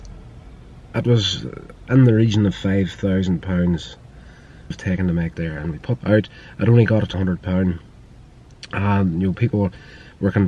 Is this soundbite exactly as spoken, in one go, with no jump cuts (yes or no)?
no